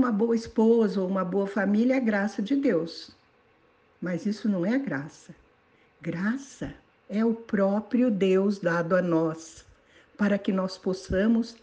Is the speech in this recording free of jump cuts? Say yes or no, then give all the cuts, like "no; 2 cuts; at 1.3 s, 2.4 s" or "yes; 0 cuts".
yes; 0 cuts